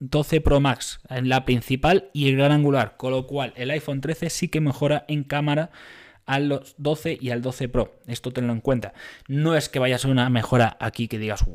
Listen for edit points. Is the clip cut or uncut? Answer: uncut